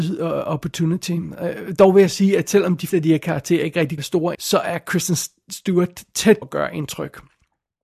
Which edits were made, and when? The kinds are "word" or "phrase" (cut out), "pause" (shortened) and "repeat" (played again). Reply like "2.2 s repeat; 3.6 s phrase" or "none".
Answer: 2.9 s word; 4.0 s word; 4.3 s word; 6.4 s word